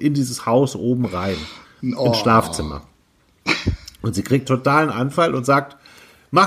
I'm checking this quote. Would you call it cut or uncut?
cut